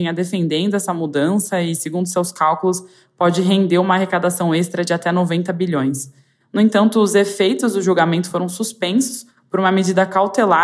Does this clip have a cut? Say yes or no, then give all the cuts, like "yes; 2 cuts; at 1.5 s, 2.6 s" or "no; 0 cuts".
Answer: no; 0 cuts